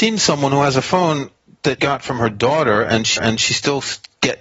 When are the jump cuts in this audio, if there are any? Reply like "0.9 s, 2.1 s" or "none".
1.8 s, 3.2 s